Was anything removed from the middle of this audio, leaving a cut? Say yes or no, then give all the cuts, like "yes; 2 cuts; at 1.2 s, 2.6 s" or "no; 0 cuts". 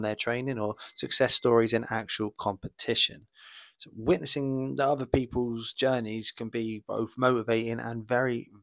no; 0 cuts